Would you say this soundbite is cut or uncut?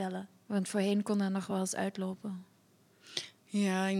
uncut